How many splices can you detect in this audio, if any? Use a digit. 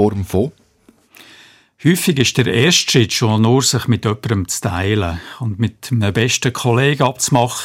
0